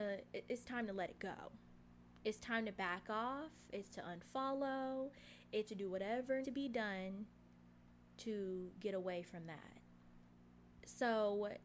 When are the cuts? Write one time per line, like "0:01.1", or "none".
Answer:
0:03.9
0:05.7
0:06.4